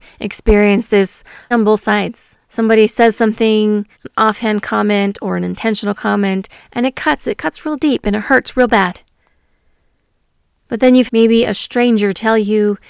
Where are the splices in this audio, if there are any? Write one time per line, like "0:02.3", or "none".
0:01.5
0:02.4
0:03.9
0:11.1